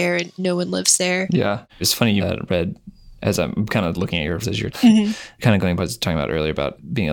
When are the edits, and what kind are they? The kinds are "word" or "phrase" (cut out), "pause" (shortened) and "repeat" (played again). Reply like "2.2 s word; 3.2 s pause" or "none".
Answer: 1.7 s pause; 2.2 s word; 3.2 s pause; 4.4 s word; 4.7 s word; 5.8 s phrase